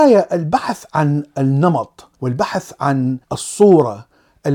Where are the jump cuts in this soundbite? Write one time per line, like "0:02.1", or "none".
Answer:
0:02.1
0:03.2